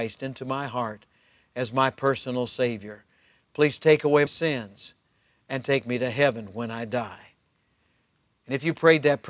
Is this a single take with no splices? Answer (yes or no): no